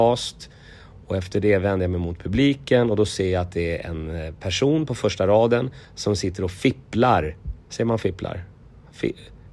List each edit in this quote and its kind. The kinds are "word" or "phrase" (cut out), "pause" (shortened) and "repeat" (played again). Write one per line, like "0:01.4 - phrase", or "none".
0:05.8 - pause
0:07.6 - pause